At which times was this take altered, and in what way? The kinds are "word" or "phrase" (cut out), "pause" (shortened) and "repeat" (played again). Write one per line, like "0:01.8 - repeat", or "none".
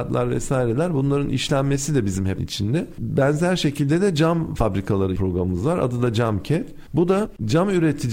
0:02.4 - word
0:05.1 - word